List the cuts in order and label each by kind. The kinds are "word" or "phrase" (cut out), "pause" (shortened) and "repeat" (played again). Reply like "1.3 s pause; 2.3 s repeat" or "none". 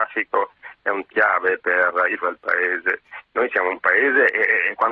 1.1 s word; 2.2 s word